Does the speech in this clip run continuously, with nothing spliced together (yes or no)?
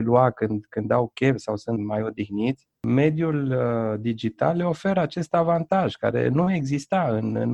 no